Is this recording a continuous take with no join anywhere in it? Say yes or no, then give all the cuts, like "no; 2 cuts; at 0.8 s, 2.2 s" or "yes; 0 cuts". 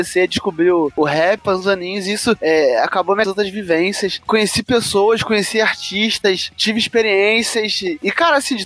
no; 1 cut; at 3.2 s